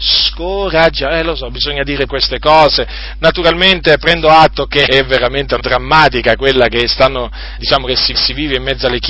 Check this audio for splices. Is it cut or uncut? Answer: cut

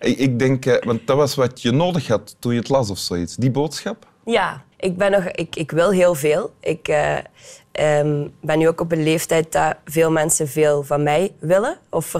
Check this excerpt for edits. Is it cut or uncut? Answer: cut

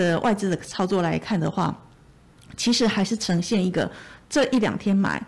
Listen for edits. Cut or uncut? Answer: cut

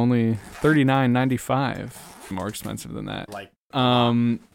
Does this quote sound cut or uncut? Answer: cut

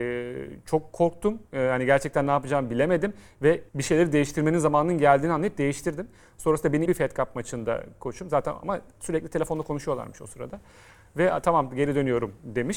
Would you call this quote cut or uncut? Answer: cut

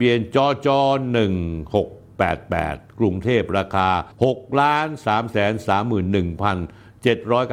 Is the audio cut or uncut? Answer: cut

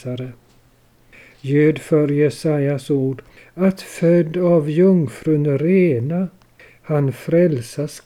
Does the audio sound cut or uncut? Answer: uncut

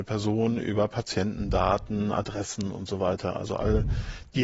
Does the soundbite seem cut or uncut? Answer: uncut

